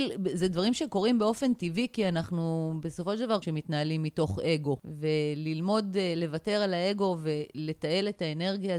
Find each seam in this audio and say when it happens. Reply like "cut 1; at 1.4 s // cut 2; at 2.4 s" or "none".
cut 1; at 3.4 s

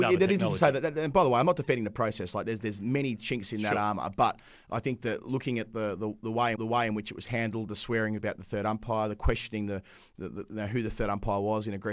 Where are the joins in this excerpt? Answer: cut 1; at 6.5 s

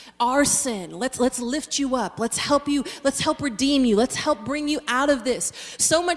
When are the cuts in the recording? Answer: none

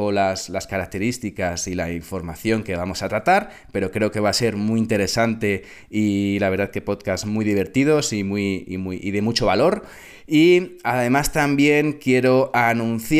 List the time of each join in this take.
none

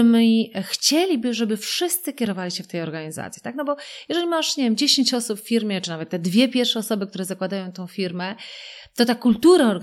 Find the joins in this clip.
none

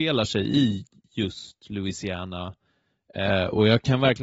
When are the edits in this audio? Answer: none

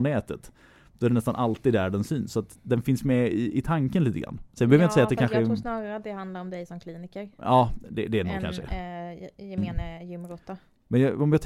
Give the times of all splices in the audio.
cut 1; at 2.6 s

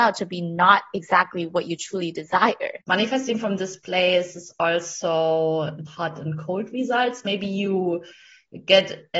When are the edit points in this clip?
cut 1; at 2.8 s // cut 2; at 5.9 s

